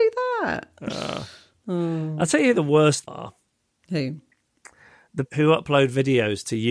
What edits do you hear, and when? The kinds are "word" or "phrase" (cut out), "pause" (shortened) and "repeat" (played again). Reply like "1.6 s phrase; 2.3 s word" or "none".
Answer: 3.1 s word; 5.3 s word